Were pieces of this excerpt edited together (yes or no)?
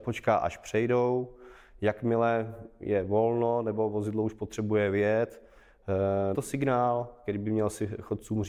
yes